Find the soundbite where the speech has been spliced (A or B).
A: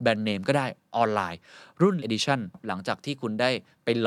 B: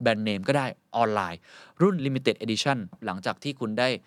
A